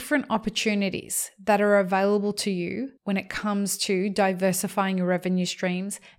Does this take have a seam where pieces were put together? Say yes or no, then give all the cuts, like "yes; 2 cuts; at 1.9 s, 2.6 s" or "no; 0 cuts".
yes; 1 cut; at 3.0 s